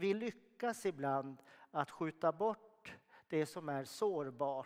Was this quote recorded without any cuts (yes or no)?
yes